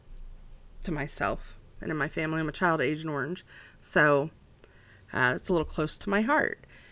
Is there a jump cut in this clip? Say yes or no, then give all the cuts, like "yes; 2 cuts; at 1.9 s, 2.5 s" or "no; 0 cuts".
no; 0 cuts